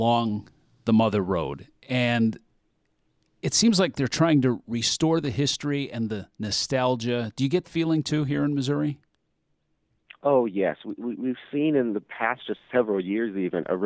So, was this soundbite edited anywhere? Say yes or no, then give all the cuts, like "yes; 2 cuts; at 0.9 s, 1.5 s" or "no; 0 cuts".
yes; 1 cut; at 7.6 s